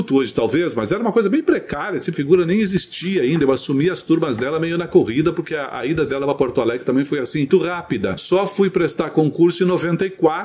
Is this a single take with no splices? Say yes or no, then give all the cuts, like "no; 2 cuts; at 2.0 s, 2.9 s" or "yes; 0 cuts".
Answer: no; 2 cuts; at 2.1 s, 7.5 s